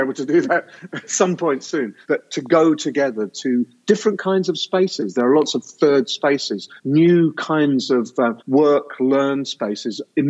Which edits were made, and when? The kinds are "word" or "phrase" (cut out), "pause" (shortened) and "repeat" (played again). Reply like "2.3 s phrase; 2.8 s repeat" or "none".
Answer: 2.0 s pause; 6.8 s pause; 8.4 s pause